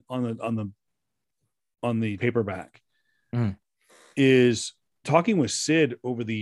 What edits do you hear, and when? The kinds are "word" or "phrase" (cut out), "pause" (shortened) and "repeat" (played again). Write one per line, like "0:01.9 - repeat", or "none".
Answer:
0:02.2 - word
0:05.0 - word